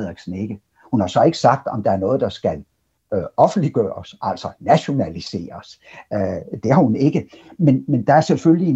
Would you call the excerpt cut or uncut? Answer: uncut